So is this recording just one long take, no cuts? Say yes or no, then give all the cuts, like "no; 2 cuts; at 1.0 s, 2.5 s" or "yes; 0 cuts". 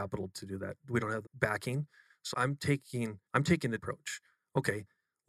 no; 4 cuts; at 1.2 s, 2.3 s, 3.3 s, 3.8 s